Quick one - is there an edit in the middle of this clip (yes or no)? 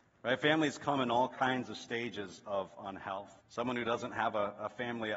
yes